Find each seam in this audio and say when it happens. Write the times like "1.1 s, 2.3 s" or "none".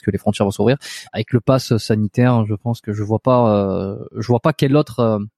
1.1 s